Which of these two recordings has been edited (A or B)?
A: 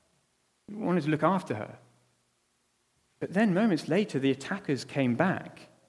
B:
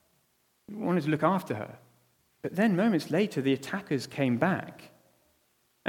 B